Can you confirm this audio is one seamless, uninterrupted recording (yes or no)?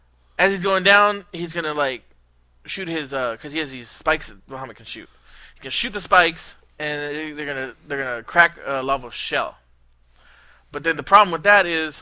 yes